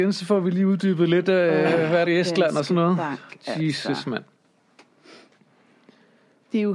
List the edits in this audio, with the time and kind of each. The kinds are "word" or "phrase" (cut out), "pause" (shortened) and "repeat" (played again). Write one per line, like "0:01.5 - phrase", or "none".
0:02.1 - phrase